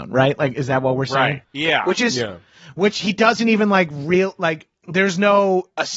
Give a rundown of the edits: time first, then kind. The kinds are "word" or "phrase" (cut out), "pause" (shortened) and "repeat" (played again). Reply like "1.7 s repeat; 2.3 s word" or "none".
4.8 s pause